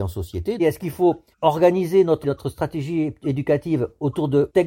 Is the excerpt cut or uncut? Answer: cut